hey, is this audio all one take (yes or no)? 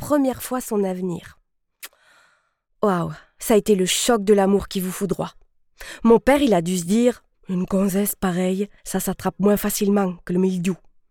no